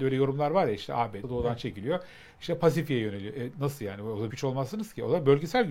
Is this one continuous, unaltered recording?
no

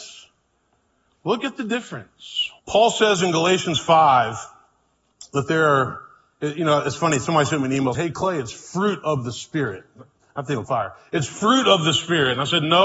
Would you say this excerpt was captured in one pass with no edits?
no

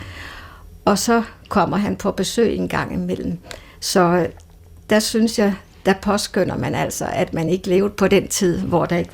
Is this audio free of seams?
yes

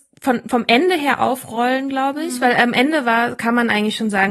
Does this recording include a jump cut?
no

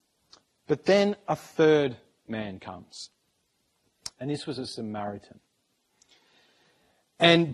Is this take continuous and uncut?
yes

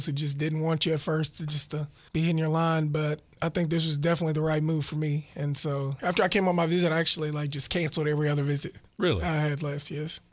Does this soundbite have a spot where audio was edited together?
no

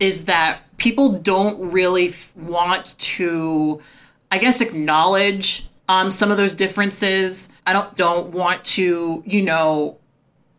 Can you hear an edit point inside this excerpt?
yes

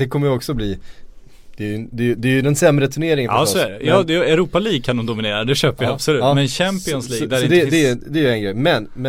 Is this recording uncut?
yes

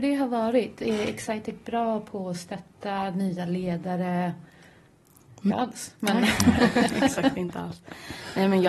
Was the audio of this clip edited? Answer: yes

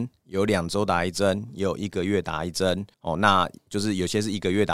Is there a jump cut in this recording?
yes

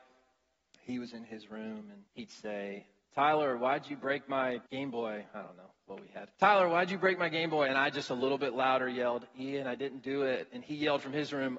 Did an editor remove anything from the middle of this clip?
yes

